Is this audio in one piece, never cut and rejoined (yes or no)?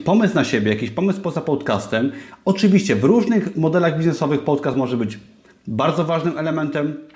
yes